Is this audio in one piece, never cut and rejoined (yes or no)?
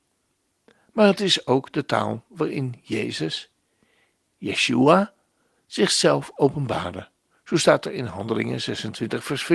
yes